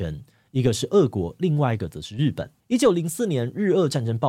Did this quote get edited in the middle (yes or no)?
yes